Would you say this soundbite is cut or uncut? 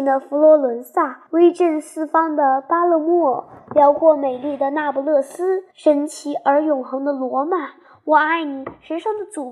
cut